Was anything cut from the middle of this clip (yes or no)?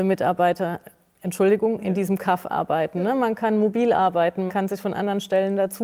yes